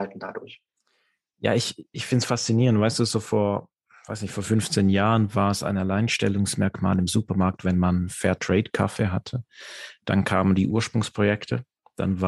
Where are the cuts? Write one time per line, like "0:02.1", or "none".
none

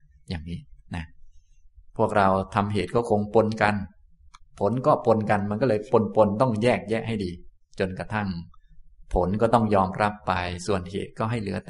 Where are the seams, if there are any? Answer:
none

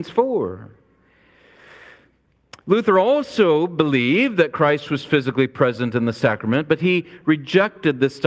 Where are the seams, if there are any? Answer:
none

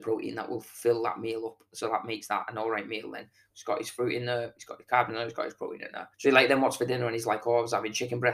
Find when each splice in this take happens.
0:06.1

